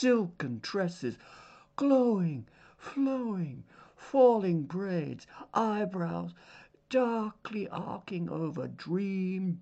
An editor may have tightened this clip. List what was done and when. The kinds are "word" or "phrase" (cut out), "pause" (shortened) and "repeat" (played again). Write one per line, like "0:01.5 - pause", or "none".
none